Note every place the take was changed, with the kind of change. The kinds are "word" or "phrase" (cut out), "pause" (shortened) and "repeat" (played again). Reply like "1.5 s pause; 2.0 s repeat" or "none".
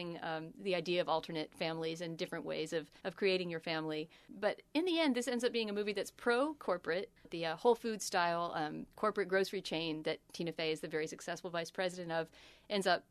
3.0 s pause; 4.7 s pause

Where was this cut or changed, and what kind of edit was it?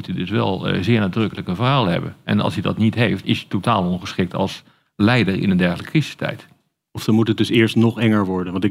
3.2 s word

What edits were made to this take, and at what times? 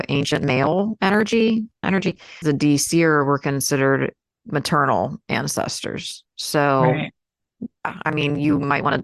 1.8 s word; 2.4 s word; 4.4 s word

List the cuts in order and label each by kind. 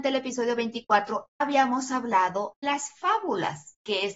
1.4 s word; 2.6 s word

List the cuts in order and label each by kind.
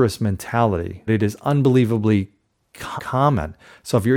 1.1 s word; 3.0 s word

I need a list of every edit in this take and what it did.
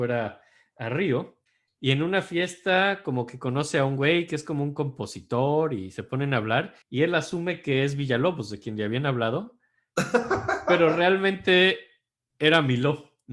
1.5 s pause; 6.8 s pause

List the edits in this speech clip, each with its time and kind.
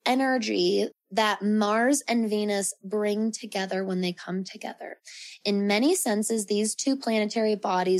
0.9 s word

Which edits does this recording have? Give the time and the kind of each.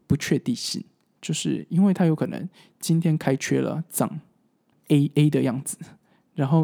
4.7 s phrase

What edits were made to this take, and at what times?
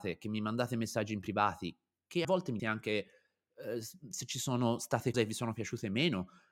2.2 s word; 2.6 s word; 5.1 s word

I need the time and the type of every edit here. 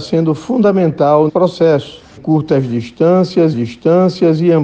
1.3 s word; 2.2 s word; 3.5 s repeat

